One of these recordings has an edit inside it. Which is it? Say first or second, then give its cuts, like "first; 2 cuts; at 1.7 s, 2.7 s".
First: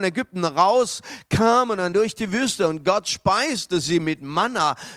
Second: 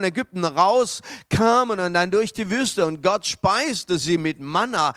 first; 1 cut; at 1.9 s